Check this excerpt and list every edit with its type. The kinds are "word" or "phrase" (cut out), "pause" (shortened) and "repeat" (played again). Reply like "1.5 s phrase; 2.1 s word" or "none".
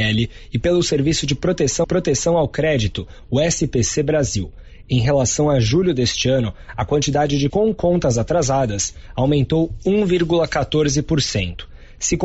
1.8 s repeat; 7.5 s word